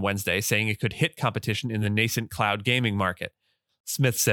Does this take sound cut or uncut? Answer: uncut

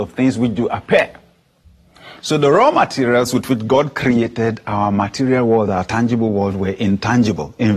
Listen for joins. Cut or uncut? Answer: uncut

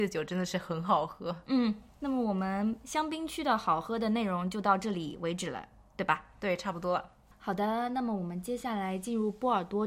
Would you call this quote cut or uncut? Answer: uncut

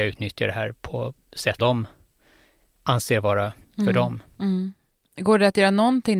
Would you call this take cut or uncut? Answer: cut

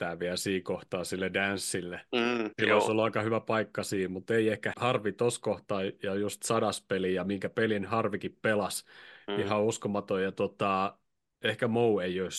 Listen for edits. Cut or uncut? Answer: cut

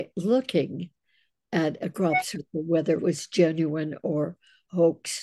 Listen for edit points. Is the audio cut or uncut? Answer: cut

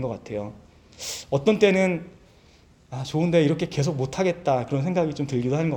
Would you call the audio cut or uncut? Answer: uncut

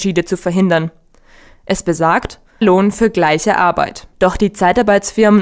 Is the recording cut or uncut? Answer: cut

